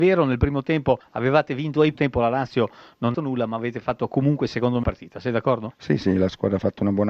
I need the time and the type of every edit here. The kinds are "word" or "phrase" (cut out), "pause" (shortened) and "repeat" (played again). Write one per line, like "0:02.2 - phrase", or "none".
0:01.9 - phrase
0:03.1 - phrase
0:04.8 - phrase